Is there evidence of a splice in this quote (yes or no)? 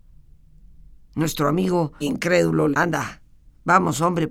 yes